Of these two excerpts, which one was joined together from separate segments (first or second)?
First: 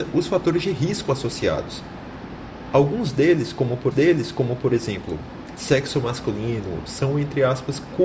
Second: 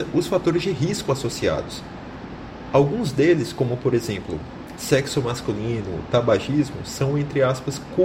first